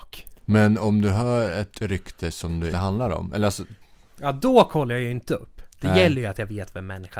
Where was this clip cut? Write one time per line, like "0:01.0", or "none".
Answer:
0:02.7